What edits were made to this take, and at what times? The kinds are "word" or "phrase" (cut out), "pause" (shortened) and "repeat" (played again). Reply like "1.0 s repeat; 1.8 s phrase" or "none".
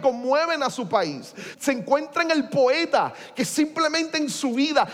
1.5 s word